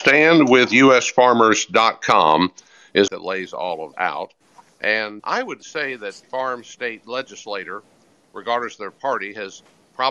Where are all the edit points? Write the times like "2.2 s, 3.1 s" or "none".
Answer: 3.1 s, 3.9 s, 5.2 s, 6.2 s